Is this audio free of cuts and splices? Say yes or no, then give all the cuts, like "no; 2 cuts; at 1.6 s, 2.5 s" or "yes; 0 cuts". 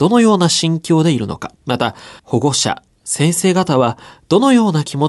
no; 2 cuts; at 1.6 s, 2.2 s